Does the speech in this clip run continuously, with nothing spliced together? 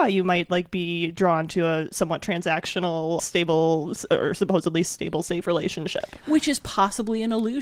no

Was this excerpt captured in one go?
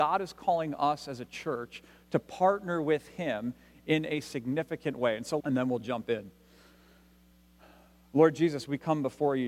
no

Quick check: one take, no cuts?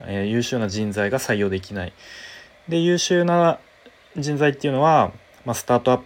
yes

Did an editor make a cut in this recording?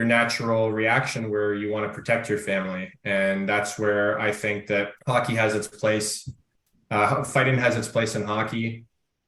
yes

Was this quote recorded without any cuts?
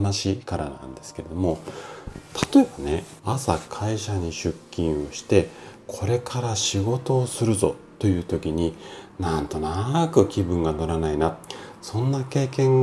no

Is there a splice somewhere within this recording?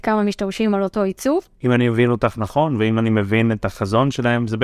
yes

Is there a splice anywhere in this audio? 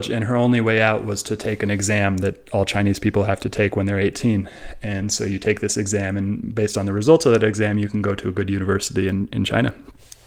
no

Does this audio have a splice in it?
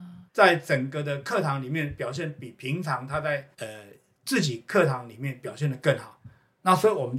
yes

